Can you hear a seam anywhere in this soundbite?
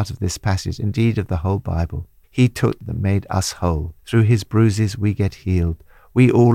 yes; 3 cuts; at 2.2 s, 2.8 s, 4.0 s

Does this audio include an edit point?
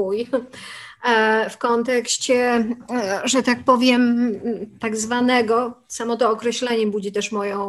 no; 0 cuts

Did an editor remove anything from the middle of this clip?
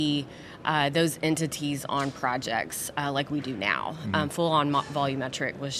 no; 0 cuts

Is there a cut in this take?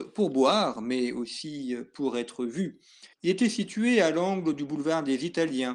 yes; 1 cut; at 3.1 s

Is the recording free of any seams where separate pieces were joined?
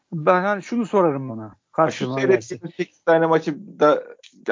no; 1 cut; at 1.3 s

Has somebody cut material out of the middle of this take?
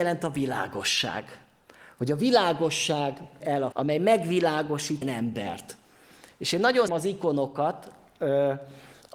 yes; 4 cuts; at 3.4 s, 3.7 s, 5.0 s, 6.9 s

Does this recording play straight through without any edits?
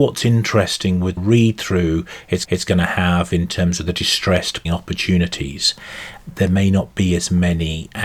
no; 3 cuts; at 1.2 s, 2.4 s, 4.7 s

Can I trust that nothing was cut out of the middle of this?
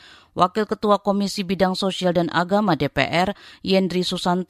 yes; 0 cuts

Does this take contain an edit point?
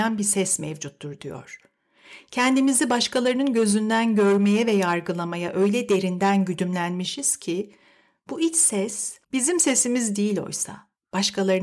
yes; 1 cut; at 9.2 s

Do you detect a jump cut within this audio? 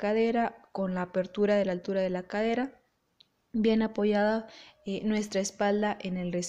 no; 0 cuts

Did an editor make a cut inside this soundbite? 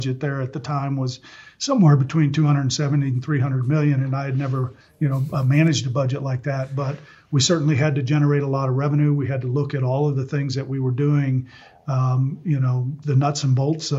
yes; 2 cuts; at 4.8 s, 13.0 s

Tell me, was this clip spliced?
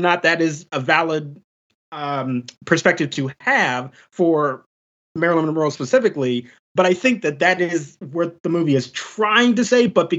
no; 0 cuts

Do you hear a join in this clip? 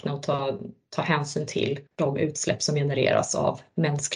yes; 1 cut; at 1.9 s

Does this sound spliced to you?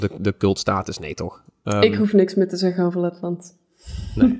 no; 0 cuts

